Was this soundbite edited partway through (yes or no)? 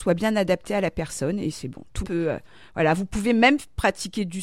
yes